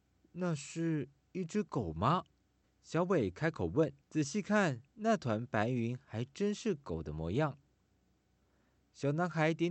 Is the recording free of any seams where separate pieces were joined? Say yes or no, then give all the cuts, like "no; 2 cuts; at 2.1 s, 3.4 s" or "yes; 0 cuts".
no; 3 cuts; at 2.6 s, 4.0 s, 4.9 s